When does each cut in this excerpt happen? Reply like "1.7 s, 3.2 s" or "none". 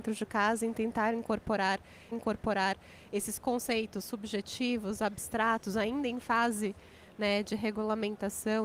2.1 s